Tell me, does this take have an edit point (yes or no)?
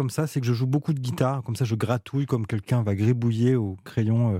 no